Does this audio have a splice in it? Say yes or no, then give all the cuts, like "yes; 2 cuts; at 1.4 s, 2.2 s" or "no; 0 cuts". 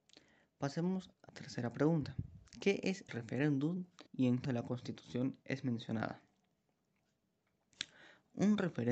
yes; 5 cuts; at 1.3 s, 2.5 s, 3.1 s, 4.1 s, 4.4 s